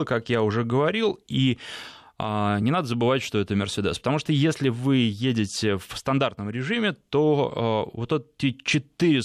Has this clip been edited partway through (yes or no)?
no